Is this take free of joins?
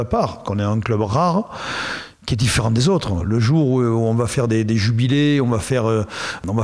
yes; 0 cuts

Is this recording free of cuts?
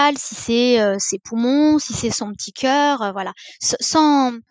yes; 0 cuts

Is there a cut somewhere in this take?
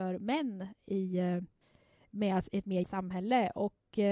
yes; 1 cut; at 2.8 s

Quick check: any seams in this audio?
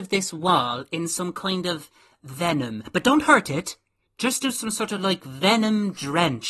no; 0 cuts

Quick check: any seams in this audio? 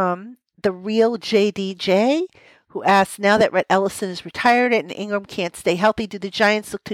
no; 0 cuts

